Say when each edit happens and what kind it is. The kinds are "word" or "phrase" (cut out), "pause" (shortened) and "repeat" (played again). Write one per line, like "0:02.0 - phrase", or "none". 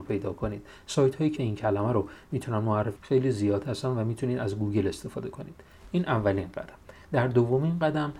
0:01.4 - word
0:03.0 - word